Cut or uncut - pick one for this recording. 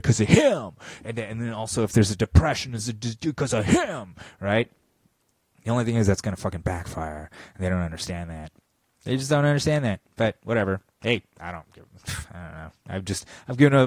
uncut